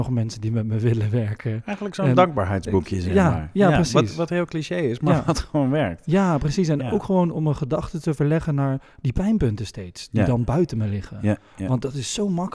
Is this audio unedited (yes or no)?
yes